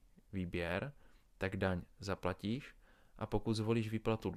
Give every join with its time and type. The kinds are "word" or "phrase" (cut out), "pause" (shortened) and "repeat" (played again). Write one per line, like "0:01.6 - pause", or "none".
none

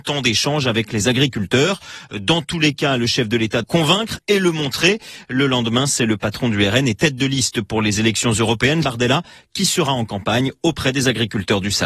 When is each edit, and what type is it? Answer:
0:03.6 - word
0:08.8 - word

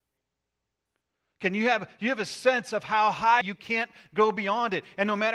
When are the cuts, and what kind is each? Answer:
0:03.4 - phrase

